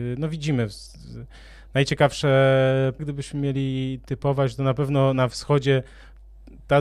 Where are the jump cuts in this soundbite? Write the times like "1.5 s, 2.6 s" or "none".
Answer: 3.0 s